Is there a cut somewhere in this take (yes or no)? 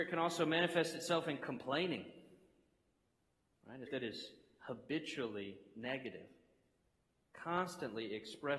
yes